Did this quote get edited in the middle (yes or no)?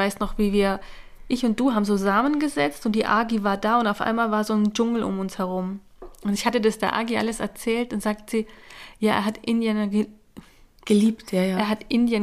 no